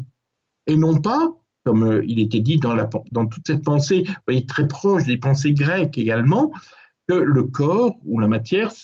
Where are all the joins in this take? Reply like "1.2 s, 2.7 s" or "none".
none